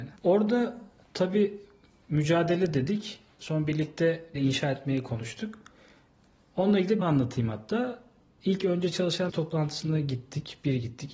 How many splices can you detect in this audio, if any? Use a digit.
3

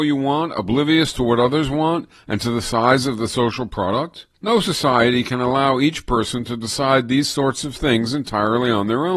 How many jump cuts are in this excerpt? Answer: 1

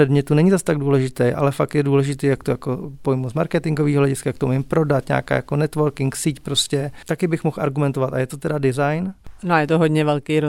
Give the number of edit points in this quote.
0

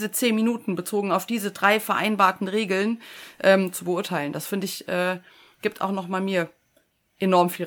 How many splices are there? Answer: 0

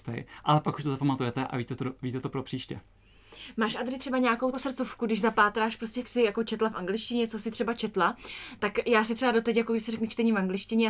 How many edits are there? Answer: 2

